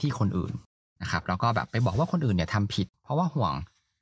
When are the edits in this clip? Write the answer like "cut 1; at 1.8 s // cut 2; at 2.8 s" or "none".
none